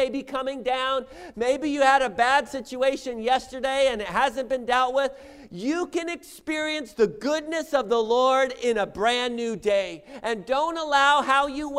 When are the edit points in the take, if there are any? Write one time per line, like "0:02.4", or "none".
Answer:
none